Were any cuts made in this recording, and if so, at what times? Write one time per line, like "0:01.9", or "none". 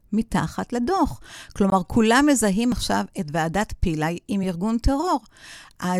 none